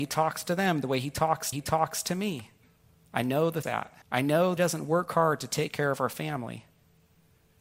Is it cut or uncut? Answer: cut